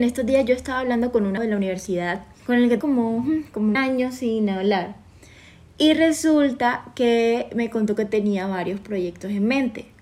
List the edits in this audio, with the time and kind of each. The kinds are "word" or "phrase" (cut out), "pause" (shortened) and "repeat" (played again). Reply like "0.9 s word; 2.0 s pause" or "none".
1.4 s word; 2.4 s word; 2.8 s word; 3.7 s word

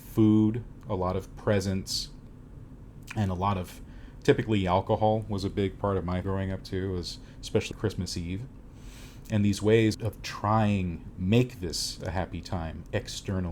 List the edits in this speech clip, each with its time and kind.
6.2 s word; 7.7 s word; 9.9 s word; 11.1 s word

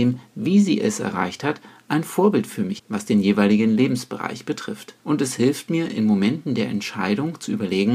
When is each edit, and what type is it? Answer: 2.8 s word; 5.0 s pause

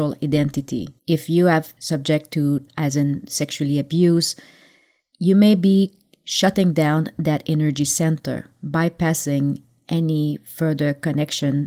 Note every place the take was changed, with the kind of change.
1.0 s pause; 1.8 s word; 2.7 s word; 3.3 s word

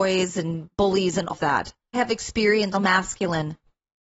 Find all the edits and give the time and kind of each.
1.3 s word; 1.9 s word; 2.7 s word

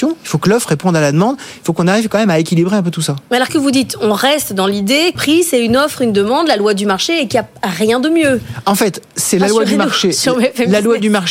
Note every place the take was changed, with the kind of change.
3.5 s word; 5.1 s word

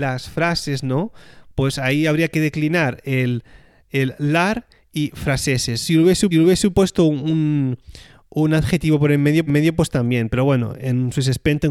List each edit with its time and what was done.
6.3 s repeat; 9.5 s repeat

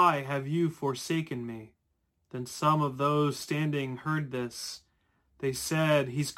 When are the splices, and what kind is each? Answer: 2.1 s pause

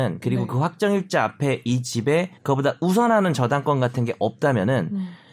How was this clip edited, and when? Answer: 2.4 s pause

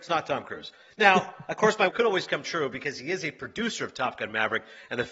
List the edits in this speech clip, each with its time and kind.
1.9 s phrase

